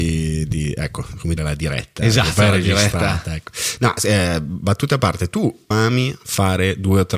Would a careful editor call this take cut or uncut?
cut